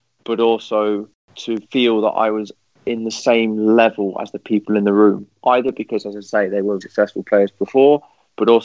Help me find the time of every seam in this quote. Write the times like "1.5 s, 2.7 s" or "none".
1.6 s, 6.8 s